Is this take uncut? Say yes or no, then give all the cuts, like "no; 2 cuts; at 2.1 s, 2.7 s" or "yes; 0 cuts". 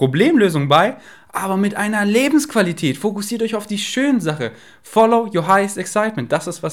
yes; 0 cuts